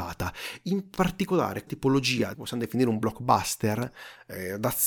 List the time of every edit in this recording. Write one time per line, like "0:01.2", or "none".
0:01.7
0:02.3